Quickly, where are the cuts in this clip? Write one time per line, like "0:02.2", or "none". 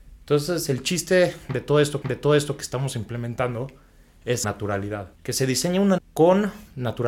0:02.0
0:04.4
0:05.1
0:06.0